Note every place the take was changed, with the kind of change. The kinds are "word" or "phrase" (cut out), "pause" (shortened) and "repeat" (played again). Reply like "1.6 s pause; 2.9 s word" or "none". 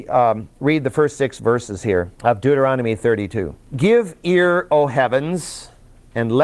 2.1 s pause; 3.6 s pause